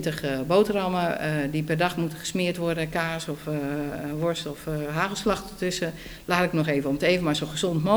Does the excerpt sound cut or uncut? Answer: uncut